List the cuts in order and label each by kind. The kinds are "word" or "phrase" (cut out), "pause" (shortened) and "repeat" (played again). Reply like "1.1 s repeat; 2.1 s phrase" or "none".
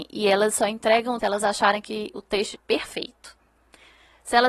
1.2 s word; 2.5 s word